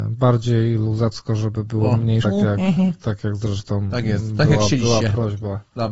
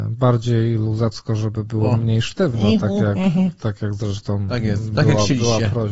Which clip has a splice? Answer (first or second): first